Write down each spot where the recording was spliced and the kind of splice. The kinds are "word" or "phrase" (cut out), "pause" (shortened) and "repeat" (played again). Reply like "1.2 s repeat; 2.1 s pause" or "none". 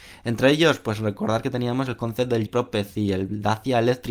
2.5 s word